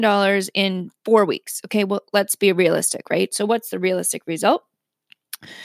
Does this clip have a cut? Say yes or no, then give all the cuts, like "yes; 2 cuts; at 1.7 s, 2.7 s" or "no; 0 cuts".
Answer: no; 0 cuts